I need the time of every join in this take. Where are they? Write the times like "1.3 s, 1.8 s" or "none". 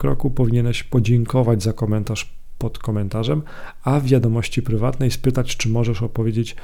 none

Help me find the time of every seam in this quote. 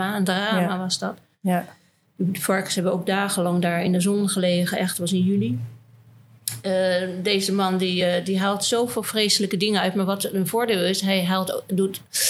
none

